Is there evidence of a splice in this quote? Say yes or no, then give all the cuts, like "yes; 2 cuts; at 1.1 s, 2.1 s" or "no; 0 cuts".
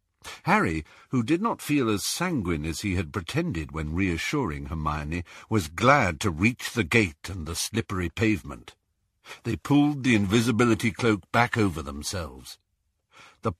no; 0 cuts